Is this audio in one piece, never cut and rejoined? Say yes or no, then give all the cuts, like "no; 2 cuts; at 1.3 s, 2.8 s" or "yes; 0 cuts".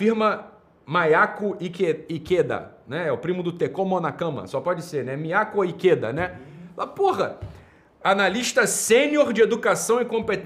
yes; 0 cuts